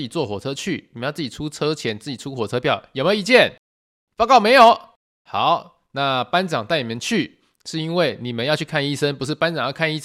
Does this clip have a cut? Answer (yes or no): no